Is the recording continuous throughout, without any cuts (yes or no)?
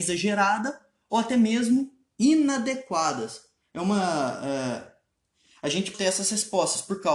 no